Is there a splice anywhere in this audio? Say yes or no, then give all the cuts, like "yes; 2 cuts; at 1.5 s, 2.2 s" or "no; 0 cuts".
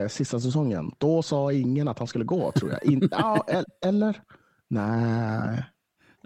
no; 0 cuts